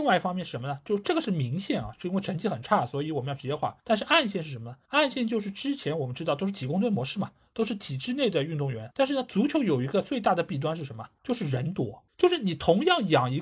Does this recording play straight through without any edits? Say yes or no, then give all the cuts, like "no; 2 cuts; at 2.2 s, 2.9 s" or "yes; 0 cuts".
yes; 0 cuts